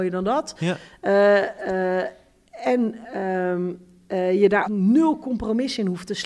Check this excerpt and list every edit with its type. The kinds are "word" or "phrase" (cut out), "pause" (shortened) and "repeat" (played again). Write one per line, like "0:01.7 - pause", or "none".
0:04.6 - word